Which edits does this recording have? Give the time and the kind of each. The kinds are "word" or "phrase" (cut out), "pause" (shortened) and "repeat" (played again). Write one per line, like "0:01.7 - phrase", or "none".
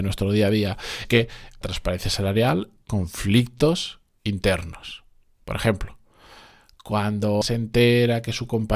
0:01.0 - word
0:01.6 - word
0:02.8 - word
0:07.4 - word